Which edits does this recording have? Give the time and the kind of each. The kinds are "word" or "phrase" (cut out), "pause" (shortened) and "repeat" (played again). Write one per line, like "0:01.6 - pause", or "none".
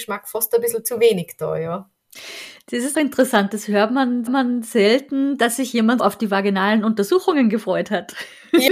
0:02.9 - word
0:04.3 - repeat
0:06.0 - word